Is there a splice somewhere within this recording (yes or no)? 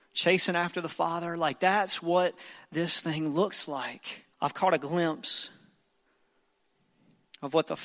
yes